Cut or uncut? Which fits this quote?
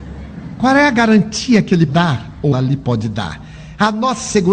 cut